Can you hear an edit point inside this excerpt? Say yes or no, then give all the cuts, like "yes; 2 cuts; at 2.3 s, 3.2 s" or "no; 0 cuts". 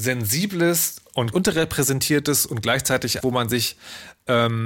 yes; 2 cuts; at 1.3 s, 3.2 s